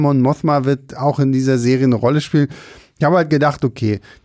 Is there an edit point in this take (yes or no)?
no